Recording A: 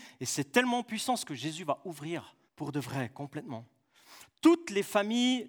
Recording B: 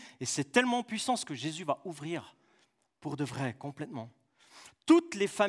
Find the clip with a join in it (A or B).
A